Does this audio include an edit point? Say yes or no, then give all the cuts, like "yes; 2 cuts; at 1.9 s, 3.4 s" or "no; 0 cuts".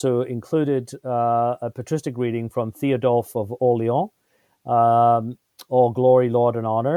no; 0 cuts